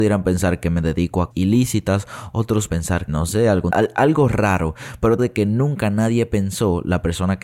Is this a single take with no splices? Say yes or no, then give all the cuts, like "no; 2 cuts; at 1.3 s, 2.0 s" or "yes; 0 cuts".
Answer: no; 5 cuts; at 1.3 s, 2.7 s, 3.1 s, 3.7 s, 5.2 s